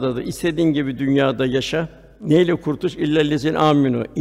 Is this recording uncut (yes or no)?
yes